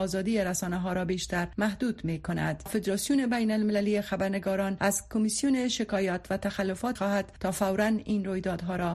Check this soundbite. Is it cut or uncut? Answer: cut